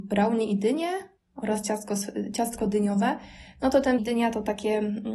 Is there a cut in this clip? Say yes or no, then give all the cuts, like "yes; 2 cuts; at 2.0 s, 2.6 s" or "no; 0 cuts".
yes; 2 cuts; at 1.2 s, 4.0 s